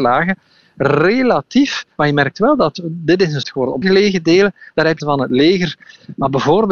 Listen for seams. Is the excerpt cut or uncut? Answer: cut